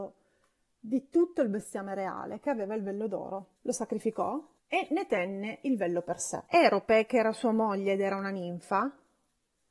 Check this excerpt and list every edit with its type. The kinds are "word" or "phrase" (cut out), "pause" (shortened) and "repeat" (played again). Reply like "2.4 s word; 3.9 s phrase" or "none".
3.6 s pause; 4.6 s pause